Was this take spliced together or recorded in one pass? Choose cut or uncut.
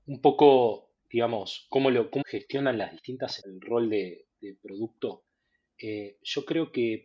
cut